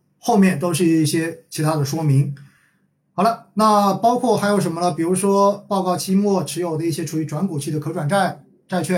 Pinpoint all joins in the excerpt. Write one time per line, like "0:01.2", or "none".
none